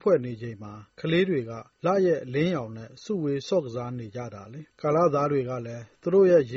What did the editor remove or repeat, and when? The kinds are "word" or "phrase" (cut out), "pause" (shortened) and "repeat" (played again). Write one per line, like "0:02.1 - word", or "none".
0:01.7 - pause
0:04.7 - pause